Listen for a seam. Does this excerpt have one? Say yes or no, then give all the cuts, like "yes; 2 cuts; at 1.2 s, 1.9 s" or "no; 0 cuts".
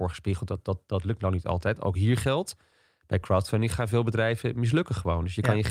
no; 0 cuts